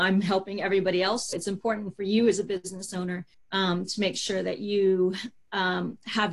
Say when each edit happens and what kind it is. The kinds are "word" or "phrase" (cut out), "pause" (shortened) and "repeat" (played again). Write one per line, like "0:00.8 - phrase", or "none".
0:01.3 - word
0:03.3 - pause